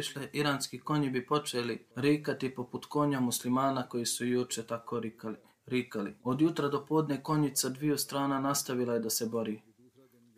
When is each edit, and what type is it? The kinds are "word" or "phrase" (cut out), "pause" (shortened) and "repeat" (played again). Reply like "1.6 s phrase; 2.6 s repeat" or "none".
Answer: 1.9 s pause; 6.2 s pause